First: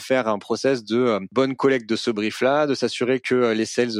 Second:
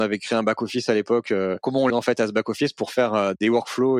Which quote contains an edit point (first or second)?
second